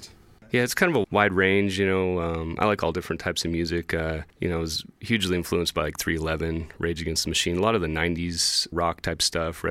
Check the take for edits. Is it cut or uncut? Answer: cut